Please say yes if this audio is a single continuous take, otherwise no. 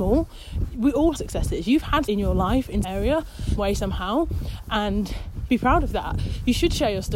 no